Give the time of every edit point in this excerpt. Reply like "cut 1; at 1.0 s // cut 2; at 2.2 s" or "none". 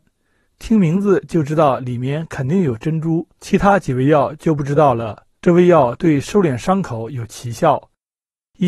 cut 1; at 3.3 s // cut 2; at 5.3 s